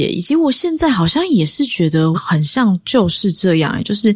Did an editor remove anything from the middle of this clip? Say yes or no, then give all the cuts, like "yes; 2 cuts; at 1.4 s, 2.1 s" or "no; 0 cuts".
yes; 1 cut; at 2.1 s